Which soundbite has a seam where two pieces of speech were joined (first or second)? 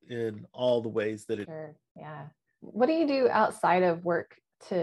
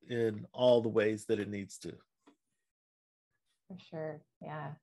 first